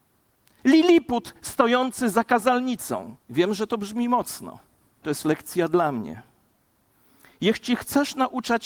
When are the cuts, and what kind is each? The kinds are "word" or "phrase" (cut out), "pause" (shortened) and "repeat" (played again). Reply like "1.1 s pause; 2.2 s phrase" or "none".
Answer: 3.2 s pause; 5.0 s word